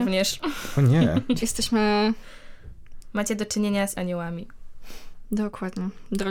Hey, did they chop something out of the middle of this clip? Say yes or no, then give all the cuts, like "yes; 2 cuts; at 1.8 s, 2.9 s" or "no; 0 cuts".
yes; 2 cuts; at 1.4 s, 3.9 s